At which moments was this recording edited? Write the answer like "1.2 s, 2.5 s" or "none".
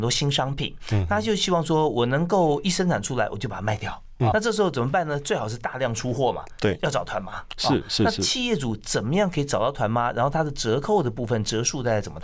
4.3 s